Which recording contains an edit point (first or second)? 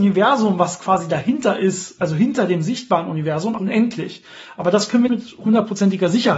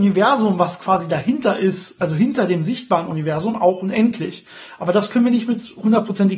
first